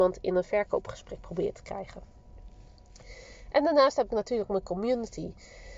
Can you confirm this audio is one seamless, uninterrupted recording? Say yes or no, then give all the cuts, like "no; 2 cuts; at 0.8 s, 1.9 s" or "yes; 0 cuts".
yes; 0 cuts